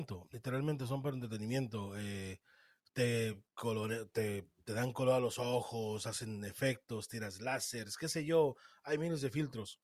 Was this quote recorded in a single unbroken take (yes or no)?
yes